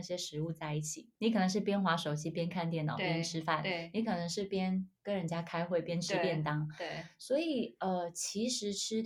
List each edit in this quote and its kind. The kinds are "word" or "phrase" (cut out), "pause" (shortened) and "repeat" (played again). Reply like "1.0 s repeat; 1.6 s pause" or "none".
1.1 s pause